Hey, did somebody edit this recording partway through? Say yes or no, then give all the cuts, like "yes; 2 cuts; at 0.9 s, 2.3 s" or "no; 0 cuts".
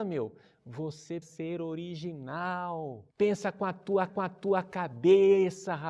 yes; 3 cuts; at 1.2 s, 3.1 s, 4.1 s